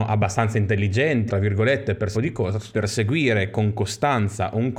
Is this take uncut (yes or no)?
no